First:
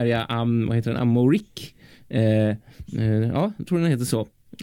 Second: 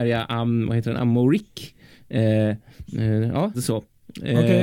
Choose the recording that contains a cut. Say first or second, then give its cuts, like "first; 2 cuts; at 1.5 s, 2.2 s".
second; 1 cut; at 3.5 s